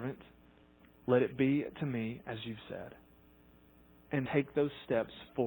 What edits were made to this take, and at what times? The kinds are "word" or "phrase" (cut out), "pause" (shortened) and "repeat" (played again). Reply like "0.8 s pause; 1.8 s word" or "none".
4.3 s word